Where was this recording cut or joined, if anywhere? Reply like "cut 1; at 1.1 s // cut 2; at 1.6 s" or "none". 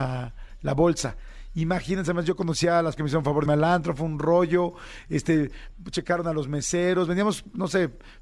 cut 1; at 3.0 s // cut 2; at 3.5 s